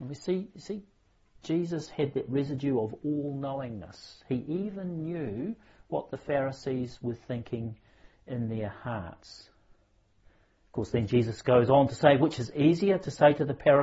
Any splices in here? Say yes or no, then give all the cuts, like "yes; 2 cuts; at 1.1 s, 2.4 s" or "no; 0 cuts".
no; 0 cuts